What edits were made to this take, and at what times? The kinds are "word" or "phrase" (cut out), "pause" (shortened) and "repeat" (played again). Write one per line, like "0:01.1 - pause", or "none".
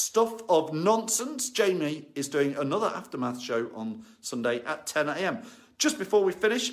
none